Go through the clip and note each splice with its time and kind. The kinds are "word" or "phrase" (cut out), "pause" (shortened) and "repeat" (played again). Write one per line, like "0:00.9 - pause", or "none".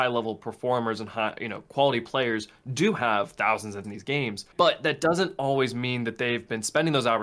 0:03.8 - phrase
0:04.5 - pause